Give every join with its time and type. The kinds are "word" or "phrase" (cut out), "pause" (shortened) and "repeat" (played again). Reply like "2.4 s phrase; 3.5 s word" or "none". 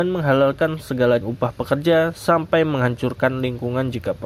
1.2 s phrase